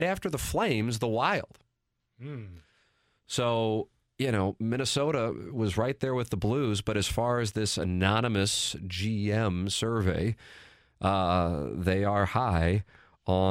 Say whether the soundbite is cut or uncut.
uncut